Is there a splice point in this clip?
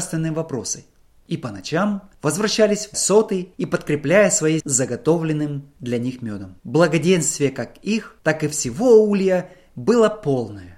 yes; 3 cuts; at 2.9 s, 4.6 s, 6.6 s

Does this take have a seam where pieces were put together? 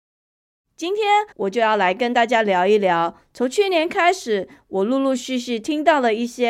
yes; 1 cut; at 1.3 s

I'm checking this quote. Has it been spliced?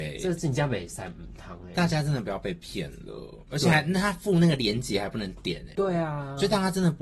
yes; 1 cut; at 5.7 s

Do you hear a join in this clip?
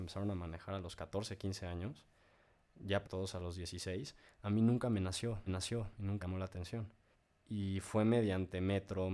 yes; 4 cuts; at 3.0 s, 5.5 s, 6.2 s, 7.1 s

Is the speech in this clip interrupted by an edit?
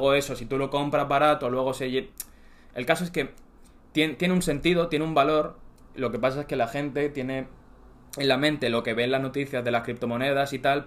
no; 0 cuts

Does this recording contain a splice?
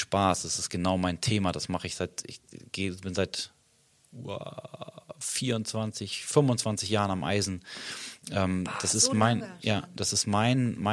no; 0 cuts

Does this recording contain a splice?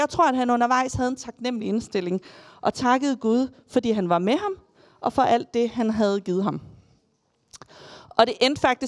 no; 0 cuts

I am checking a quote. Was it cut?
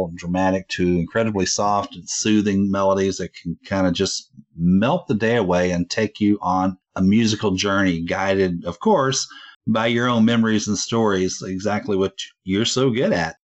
yes; 1 cut; at 9.5 s

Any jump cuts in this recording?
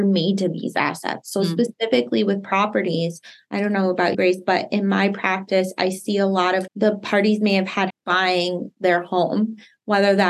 yes; 3 cuts; at 4.1 s, 6.7 s, 7.9 s

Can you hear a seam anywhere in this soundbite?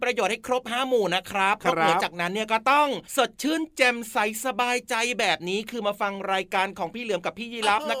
yes; 1 cut; at 3.1 s

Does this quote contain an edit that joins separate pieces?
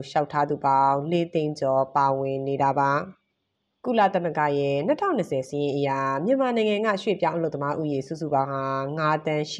no; 0 cuts

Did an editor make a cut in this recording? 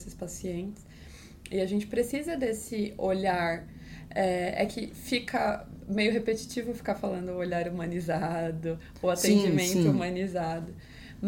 no; 0 cuts

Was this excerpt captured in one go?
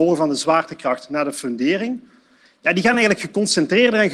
yes; 0 cuts

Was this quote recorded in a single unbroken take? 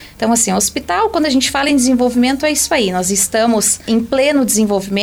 yes; 0 cuts

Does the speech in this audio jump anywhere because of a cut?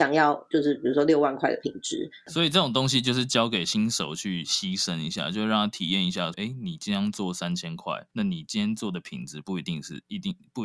yes; 2 cuts; at 6.3 s, 8.1 s

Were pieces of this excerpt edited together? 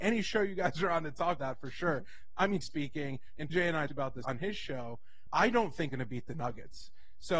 yes; 7 cuts; at 1.4 s, 2.6 s, 3.5 s, 3.9 s, 4.2 s, 5.3 s, 5.9 s

